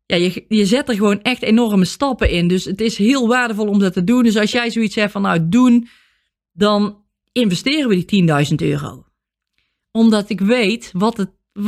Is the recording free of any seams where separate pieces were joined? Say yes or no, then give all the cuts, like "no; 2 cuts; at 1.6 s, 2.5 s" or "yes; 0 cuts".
yes; 0 cuts